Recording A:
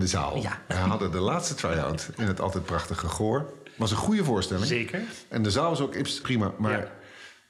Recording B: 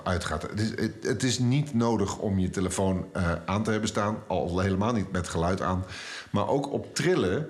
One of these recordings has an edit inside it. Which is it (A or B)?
A